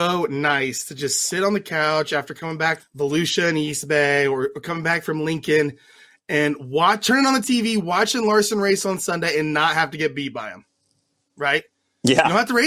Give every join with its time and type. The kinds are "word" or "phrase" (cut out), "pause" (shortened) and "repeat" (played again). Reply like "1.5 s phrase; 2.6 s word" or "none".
2.8 s word